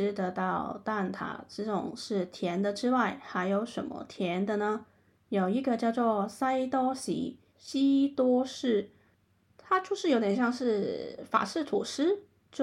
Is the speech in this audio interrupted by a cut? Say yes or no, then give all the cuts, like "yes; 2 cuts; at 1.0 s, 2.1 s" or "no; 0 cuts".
yes; 1 cut; at 7.5 s